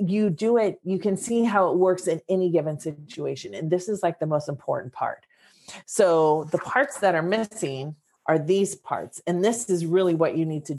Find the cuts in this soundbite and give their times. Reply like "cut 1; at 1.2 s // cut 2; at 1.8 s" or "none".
none